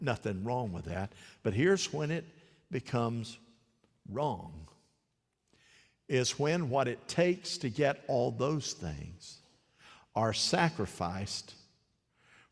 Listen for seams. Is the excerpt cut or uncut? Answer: uncut